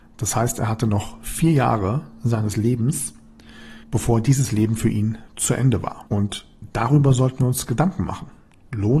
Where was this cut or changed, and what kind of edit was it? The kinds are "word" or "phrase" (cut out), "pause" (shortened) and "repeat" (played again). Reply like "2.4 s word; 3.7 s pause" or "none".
3.8 s pause; 6.1 s pause